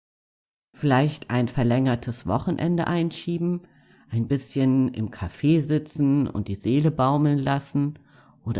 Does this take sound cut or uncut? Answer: uncut